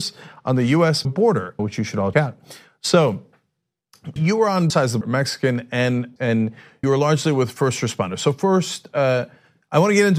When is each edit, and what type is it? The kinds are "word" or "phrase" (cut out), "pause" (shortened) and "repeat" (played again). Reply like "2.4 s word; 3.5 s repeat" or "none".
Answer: 1.0 s word; 1.6 s word; 2.1 s word; 4.2 s word; 4.7 s word; 5.0 s word; 6.2 s word; 6.8 s word

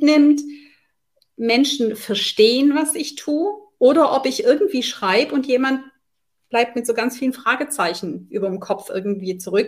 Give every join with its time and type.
none

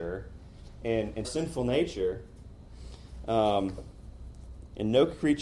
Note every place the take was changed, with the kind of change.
1.2 s phrase

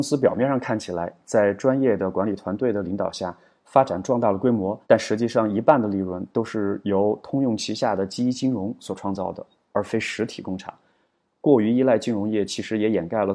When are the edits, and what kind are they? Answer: 4.8 s pause

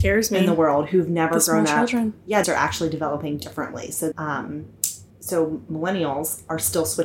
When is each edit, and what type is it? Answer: 2.4 s phrase; 4.1 s word; 5.1 s pause

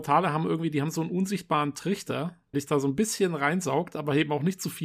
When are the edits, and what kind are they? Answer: 2.5 s word

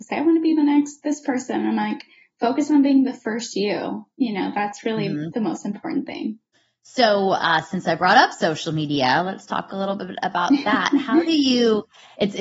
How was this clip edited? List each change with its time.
6.5 s pause

